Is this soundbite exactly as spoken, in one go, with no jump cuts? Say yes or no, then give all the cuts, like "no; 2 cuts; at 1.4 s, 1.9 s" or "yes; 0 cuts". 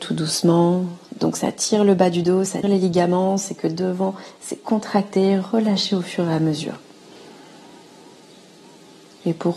no; 1 cut; at 2.6 s